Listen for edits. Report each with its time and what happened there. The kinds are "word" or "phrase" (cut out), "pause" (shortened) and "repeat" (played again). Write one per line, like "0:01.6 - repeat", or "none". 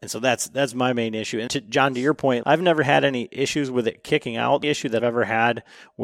0:01.5 - word
0:02.4 - word
0:04.6 - word
0:05.0 - word